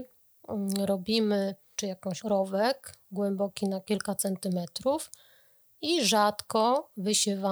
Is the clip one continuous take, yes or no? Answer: no